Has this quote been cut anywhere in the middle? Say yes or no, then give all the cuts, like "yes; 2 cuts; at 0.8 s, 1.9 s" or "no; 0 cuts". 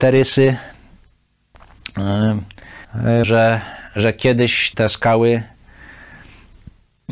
yes; 3 cuts; at 2.8 s, 3.2 s, 4.7 s